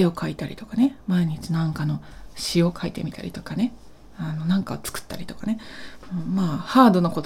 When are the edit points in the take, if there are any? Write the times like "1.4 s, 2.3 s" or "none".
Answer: none